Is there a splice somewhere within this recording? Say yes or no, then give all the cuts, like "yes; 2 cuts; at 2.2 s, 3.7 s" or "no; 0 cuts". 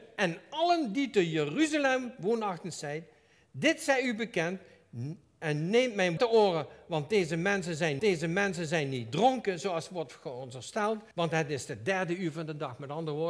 yes; 3 cuts; at 6.2 s, 8.0 s, 11.1 s